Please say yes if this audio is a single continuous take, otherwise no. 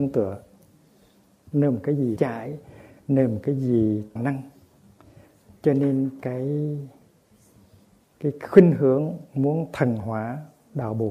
no